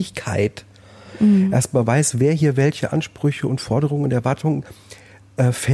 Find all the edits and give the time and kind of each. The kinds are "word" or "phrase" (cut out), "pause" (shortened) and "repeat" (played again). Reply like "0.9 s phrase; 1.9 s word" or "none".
none

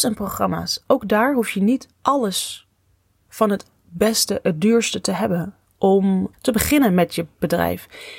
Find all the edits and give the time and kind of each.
1.9 s pause; 6.3 s word

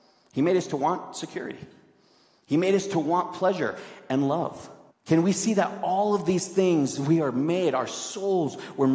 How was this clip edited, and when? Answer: 4.9 s pause

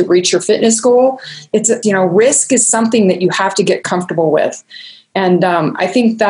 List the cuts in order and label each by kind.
1.8 s word

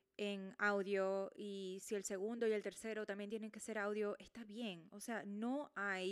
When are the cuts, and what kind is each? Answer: none

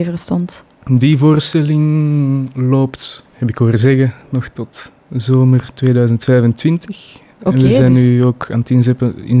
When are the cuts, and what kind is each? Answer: 5.0 s pause

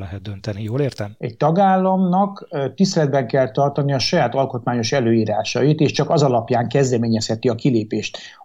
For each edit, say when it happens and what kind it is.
none

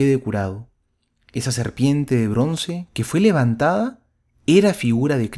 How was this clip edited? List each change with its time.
none

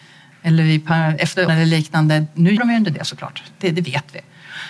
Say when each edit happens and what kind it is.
1.5 s word; 2.6 s word

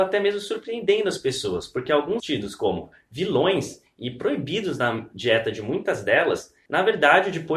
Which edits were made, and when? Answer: 2.2 s phrase

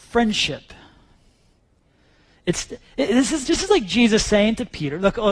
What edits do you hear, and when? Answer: 3.4 s word

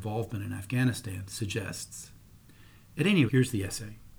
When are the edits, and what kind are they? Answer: 3.3 s word

